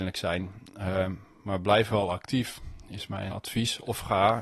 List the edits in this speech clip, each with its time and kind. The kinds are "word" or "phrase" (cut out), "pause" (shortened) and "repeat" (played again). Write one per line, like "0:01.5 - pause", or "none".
0:03.3 - word